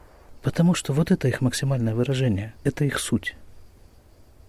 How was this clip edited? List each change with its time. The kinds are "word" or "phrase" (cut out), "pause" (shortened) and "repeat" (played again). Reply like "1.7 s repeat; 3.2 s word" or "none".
2.6 s pause